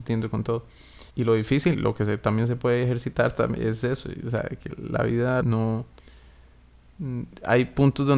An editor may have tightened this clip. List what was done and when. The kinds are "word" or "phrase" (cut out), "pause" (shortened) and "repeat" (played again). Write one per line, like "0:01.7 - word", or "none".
0:01.1 - pause
0:01.7 - word
0:05.4 - phrase